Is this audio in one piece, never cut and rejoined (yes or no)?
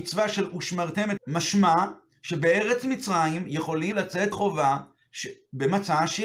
no